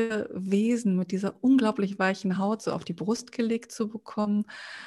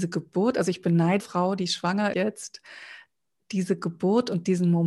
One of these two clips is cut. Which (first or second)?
second